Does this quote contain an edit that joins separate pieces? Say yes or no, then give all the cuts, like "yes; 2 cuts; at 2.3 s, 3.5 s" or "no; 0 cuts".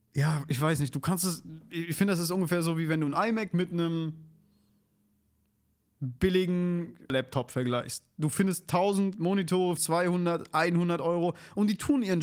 yes; 1 cut; at 9.8 s